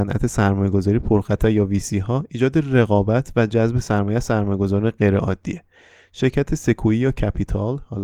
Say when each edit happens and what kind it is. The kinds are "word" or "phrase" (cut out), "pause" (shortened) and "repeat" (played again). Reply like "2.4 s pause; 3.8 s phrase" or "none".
none